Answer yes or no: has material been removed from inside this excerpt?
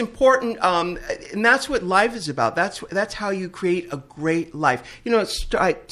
no